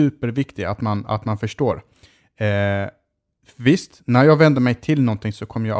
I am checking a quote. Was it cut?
no; 0 cuts

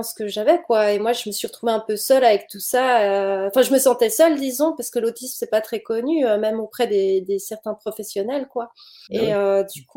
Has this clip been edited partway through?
no; 0 cuts

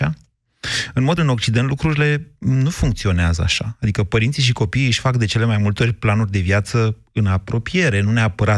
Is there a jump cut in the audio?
yes; 1 cut; at 1.2 s

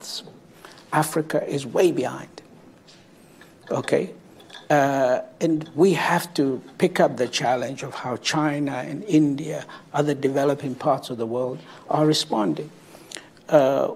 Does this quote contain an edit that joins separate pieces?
no; 0 cuts

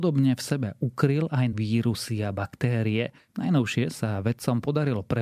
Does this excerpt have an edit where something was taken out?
yes; 1 cut; at 1.5 s

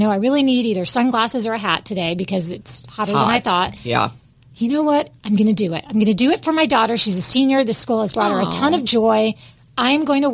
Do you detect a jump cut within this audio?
no; 0 cuts

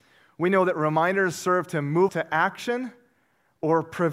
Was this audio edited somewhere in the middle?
yes; 1 cut; at 2.1 s

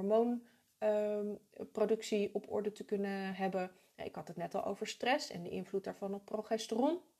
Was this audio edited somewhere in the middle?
no; 0 cuts

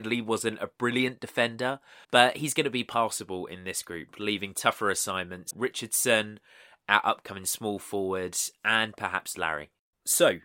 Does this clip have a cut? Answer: yes; 2 cuts; at 2.0 s, 5.5 s

